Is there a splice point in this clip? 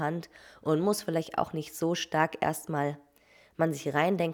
no; 0 cuts

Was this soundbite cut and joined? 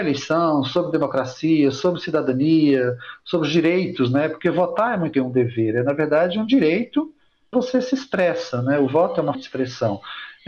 yes; 3 cuts; at 5.1 s, 7.5 s, 9.3 s

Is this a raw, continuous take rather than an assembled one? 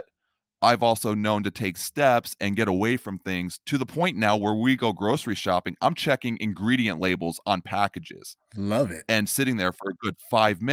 yes; 0 cuts

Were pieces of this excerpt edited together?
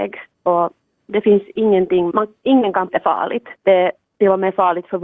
yes; 3 cuts; at 2.1 s, 2.9 s, 3.6 s

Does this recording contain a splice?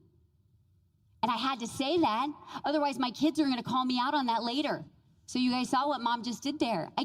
no; 0 cuts

